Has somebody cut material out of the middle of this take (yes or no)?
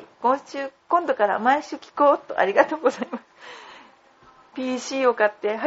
no